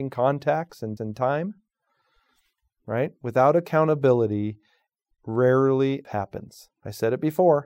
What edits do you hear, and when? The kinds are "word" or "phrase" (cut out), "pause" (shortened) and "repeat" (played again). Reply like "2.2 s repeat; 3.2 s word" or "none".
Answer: 1.0 s repeat; 6.0 s word; 6.8 s pause